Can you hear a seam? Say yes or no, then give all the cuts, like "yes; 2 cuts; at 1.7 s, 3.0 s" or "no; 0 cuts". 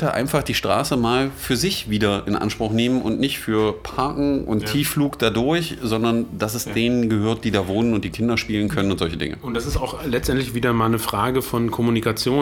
no; 0 cuts